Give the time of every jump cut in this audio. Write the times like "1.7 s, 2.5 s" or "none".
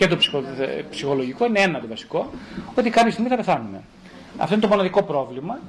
none